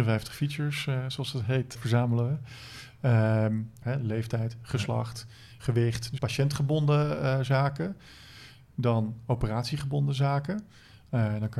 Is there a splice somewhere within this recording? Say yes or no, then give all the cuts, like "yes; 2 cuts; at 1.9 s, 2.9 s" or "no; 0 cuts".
yes; 3 cuts; at 1.8 s, 3.8 s, 6.2 s